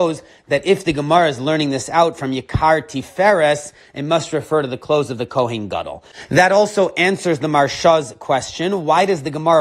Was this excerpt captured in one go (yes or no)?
yes